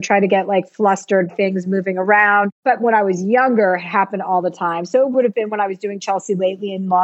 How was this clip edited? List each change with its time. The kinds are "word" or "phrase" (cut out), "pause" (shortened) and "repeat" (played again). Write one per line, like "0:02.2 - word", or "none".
0:01.3 - word
0:05.1 - word